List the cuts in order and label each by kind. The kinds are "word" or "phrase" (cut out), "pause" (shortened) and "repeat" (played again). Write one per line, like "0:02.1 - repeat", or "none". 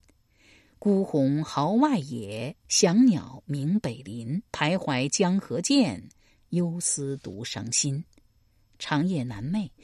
0:04.5 - pause